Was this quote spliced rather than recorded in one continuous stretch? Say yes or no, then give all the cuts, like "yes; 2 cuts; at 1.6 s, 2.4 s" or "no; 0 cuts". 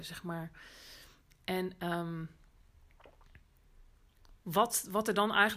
no; 0 cuts